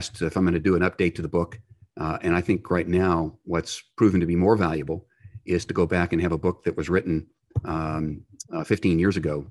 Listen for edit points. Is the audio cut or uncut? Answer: uncut